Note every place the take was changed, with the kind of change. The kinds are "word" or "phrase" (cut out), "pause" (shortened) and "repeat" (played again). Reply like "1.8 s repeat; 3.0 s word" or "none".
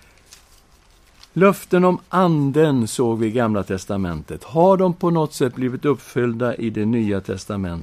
none